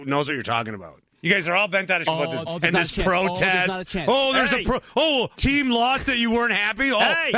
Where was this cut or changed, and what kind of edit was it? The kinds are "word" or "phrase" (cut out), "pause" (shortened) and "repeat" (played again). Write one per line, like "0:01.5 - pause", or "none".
0:01.1 - pause
0:02.1 - word
0:02.4 - phrase
0:05.3 - word